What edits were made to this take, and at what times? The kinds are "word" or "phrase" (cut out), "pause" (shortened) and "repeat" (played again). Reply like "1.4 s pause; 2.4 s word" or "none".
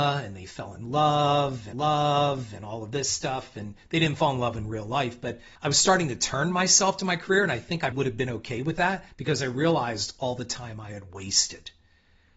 1.7 s repeat; 5.6 s pause; 7.9 s word; 9.1 s pause